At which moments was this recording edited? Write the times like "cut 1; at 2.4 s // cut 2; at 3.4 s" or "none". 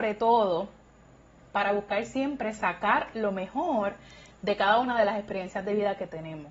none

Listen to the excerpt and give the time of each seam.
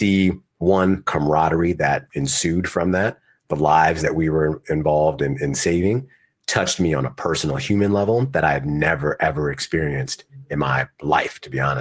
none

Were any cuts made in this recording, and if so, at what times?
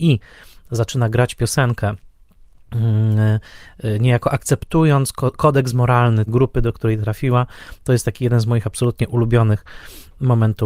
cut 1; at 6.3 s

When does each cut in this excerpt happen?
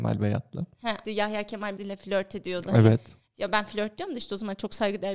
cut 1; at 1.0 s // cut 2; at 1.8 s

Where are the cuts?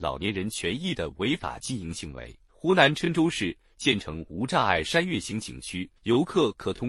cut 1; at 2.5 s // cut 2; at 6.0 s

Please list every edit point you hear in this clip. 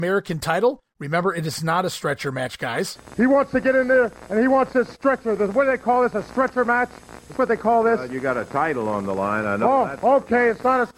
cut 1; at 7.3 s

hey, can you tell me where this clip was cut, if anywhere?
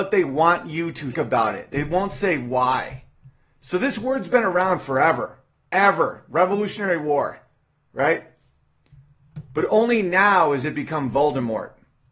cut 1; at 1.1 s

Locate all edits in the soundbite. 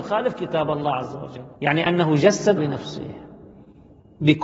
cut 1; at 1.5 s // cut 2; at 2.6 s

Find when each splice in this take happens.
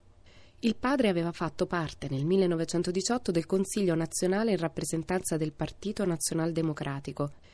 none

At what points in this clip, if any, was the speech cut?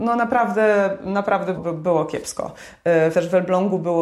cut 1; at 1.6 s // cut 2; at 3.1 s

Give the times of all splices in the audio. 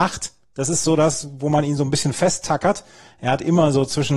none

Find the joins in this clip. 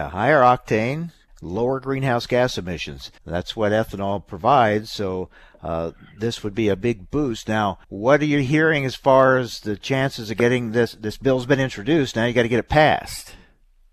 cut 1; at 1.3 s // cut 2; at 3.2 s // cut 3; at 6.1 s // cut 4; at 7.8 s

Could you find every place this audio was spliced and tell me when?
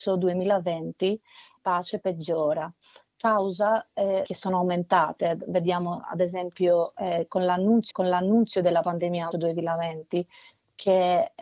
cut 1; at 1.6 s // cut 2; at 4.3 s // cut 3; at 7.9 s // cut 4; at 9.3 s

